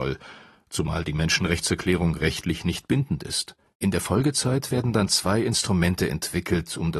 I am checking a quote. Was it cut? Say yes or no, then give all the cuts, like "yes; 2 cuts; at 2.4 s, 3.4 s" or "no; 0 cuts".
yes; 1 cut; at 3.7 s